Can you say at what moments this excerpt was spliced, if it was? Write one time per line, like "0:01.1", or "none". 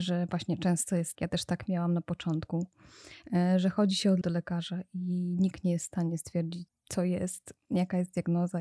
0:01.1
0:04.2
0:06.7